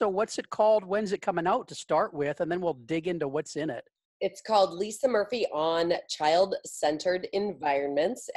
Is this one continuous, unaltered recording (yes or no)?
yes